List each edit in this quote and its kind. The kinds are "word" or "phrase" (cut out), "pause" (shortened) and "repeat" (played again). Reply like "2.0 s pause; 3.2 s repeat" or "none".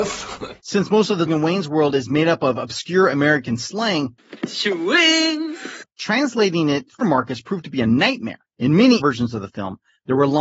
1.3 s word; 4.4 s word; 7.0 s word; 9.0 s word